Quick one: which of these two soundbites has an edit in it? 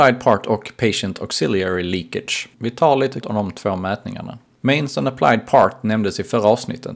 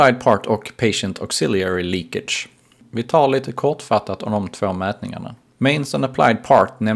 first; 2 cuts; at 2.5 s, 3.2 s

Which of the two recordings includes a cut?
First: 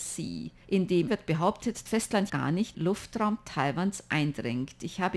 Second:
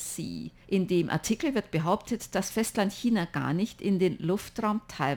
first; 4 cuts; at 1.1 s, 1.9 s, 2.3 s, 2.7 s

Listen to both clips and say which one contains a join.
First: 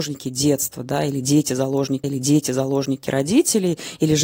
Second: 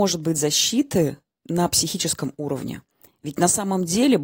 first; 1 cut; at 2.0 s

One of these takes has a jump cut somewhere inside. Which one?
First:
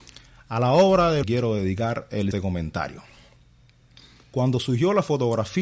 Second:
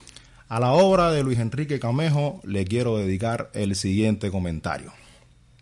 first; 2 cuts; at 1.2 s, 2.3 s

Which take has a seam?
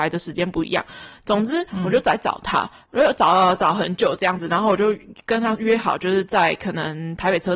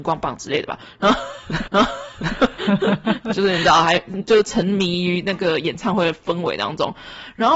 second; 1 cut; at 1.7 s

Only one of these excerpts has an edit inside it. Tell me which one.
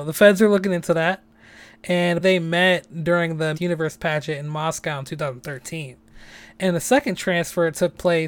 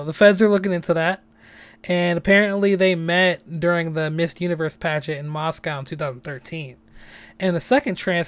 first; 2 cuts; at 2.2 s, 3.5 s

